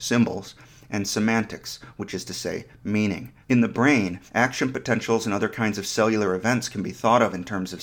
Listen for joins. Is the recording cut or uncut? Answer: cut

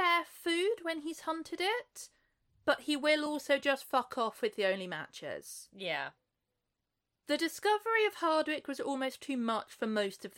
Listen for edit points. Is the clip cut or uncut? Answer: uncut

